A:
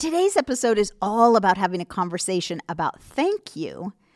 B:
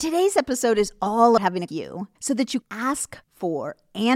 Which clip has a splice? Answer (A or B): B